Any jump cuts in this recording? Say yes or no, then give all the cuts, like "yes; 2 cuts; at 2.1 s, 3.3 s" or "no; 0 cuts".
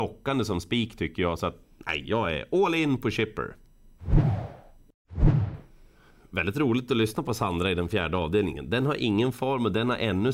no; 0 cuts